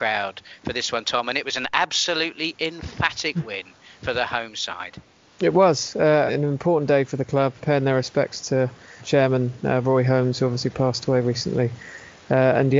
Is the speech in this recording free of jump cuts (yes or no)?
no